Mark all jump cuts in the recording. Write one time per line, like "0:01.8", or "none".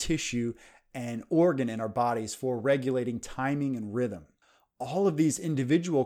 none